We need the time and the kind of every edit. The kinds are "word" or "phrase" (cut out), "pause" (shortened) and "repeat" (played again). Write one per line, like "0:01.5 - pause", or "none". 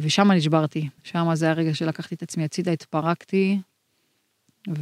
0:01.0 - pause